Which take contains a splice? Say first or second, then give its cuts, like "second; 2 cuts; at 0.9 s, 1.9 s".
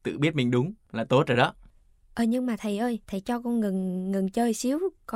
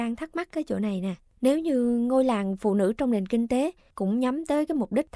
first; 1 cut; at 3.0 s